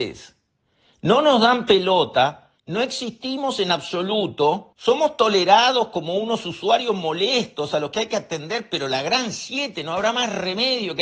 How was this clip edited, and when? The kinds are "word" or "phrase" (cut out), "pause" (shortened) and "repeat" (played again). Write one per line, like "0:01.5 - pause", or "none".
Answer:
0:02.6 - pause
0:04.7 - pause